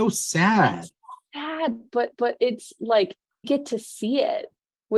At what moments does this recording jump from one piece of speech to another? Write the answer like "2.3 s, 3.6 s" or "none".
2.1 s, 3.4 s